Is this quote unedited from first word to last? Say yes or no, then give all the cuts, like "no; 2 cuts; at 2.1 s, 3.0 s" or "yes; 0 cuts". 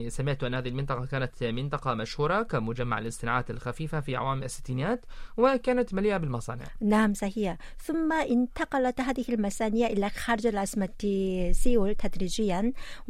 yes; 0 cuts